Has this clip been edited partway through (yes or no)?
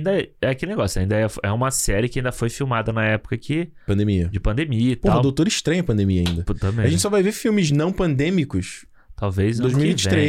no